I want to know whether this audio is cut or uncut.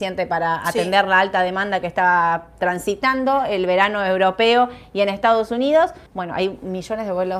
cut